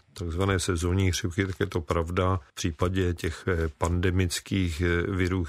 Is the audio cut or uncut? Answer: cut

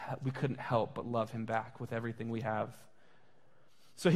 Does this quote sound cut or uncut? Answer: uncut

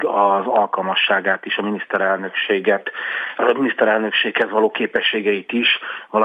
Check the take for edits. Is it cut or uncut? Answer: uncut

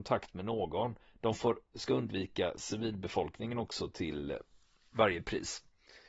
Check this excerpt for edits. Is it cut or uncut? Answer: uncut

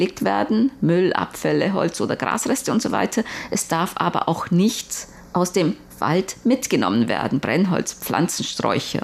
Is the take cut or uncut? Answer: uncut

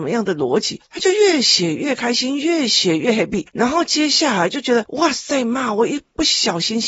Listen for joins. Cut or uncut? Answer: uncut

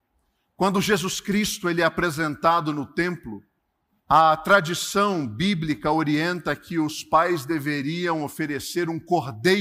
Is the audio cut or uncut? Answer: cut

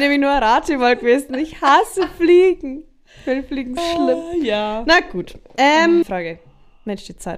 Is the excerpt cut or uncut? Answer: cut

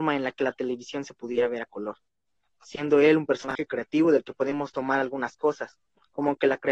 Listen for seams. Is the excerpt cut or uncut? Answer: uncut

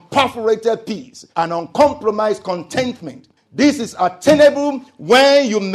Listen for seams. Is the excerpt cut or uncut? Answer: cut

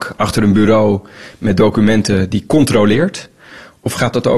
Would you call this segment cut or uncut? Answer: uncut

